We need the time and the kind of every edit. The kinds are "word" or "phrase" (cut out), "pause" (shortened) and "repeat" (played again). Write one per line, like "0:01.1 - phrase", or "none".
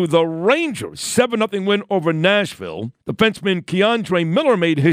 0:03.0 - pause